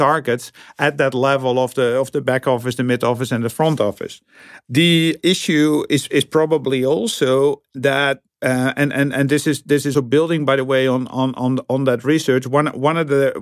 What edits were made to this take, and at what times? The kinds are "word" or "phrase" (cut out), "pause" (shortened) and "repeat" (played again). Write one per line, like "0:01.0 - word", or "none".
0:09.9 - word

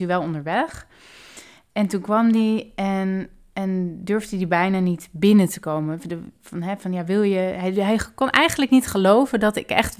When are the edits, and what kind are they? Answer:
none

